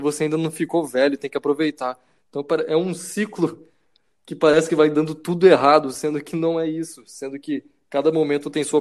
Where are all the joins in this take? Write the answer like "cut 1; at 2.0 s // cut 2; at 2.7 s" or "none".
none